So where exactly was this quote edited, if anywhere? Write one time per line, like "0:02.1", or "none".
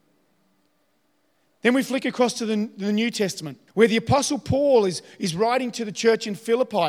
0:03.7

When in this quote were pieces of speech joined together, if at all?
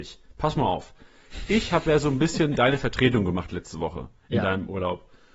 none

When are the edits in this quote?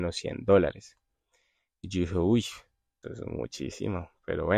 0:03.0

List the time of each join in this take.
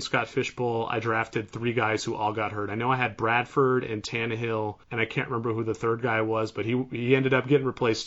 0:04.8

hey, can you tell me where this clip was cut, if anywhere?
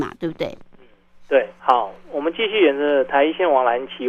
0:01.6

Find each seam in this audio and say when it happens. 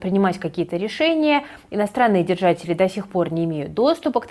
none

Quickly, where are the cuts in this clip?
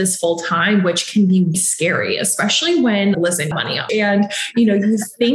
0:01.5
0:03.1
0:03.5
0:03.9

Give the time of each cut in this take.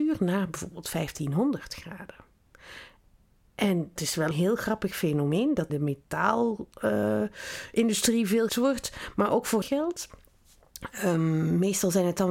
0:04.0
0:04.3
0:05.7
0:08.5
0:09.6

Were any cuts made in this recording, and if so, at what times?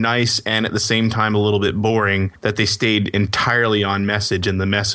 0:02.4

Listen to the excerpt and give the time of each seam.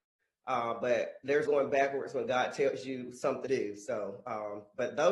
0:01.5
0:03.5

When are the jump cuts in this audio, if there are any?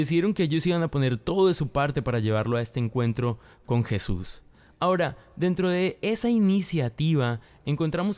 none

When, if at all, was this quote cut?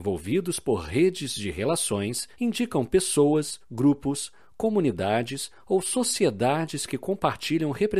0:02.3
0:03.6

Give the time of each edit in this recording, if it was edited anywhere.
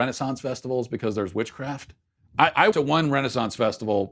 0:02.2
0:02.7

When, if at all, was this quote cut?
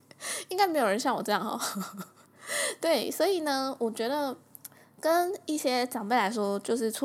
none

